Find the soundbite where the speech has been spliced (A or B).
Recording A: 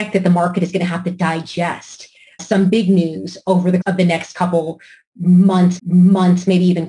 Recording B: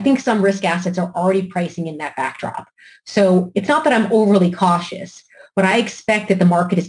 A